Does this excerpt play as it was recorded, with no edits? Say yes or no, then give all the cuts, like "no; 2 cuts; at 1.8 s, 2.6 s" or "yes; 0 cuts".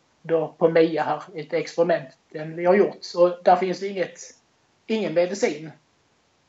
yes; 0 cuts